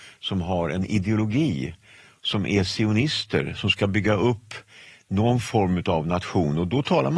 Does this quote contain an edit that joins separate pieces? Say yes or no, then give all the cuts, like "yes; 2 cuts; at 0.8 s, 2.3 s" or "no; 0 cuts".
no; 0 cuts